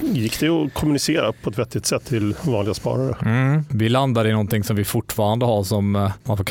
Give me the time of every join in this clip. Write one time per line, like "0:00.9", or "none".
none